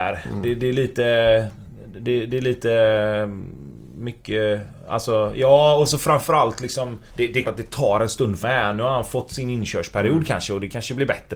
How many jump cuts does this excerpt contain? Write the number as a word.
three